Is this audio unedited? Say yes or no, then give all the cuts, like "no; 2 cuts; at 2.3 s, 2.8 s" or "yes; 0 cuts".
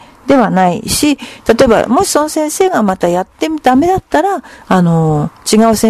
yes; 0 cuts